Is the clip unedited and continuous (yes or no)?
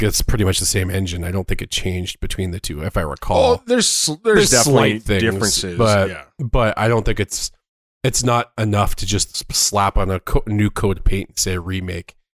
yes